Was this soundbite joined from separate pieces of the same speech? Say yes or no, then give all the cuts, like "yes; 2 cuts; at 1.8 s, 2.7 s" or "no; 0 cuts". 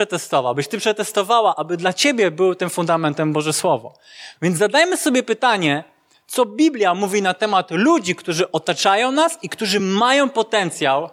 no; 0 cuts